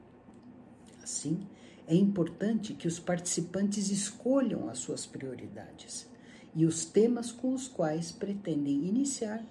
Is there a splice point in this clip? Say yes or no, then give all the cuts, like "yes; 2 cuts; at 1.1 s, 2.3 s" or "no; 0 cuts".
no; 0 cuts